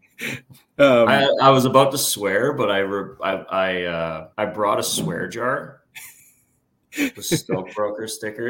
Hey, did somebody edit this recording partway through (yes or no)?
yes